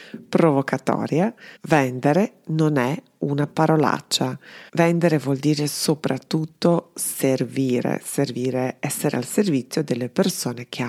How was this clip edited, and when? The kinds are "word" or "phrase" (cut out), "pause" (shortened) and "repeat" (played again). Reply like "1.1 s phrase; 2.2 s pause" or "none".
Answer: 1.6 s pause; 4.7 s pause